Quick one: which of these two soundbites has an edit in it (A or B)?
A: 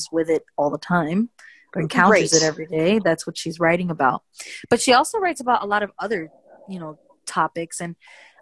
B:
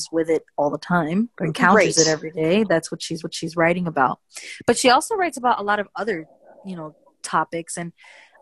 B